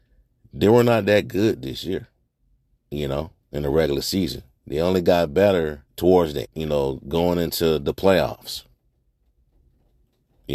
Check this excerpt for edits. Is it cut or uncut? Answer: cut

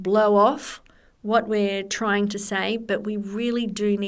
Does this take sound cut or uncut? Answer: uncut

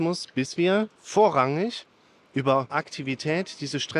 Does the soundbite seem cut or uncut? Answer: cut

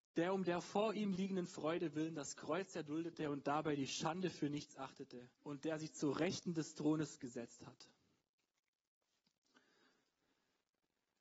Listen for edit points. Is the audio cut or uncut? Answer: cut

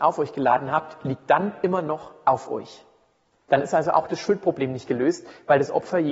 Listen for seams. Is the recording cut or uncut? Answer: uncut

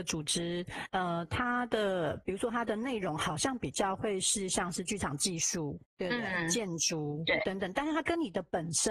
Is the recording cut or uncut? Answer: cut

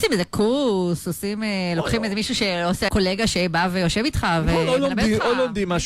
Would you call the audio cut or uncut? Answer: cut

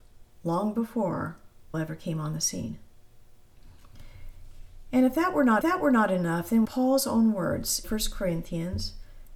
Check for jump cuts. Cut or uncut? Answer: cut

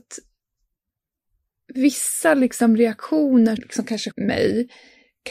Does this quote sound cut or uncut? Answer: cut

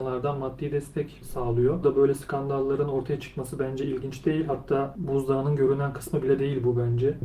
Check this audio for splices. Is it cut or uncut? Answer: cut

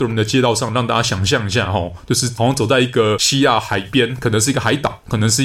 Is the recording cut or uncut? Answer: uncut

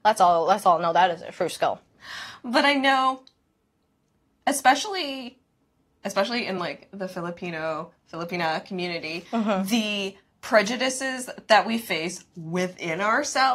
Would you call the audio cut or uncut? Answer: uncut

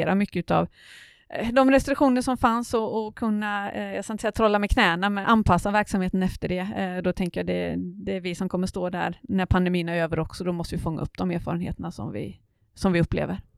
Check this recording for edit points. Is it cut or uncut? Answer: cut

